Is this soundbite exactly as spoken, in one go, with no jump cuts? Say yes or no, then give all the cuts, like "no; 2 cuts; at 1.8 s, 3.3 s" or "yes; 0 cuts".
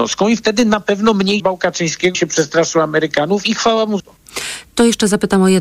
no; 3 cuts; at 1.4 s, 2.1 s, 4.0 s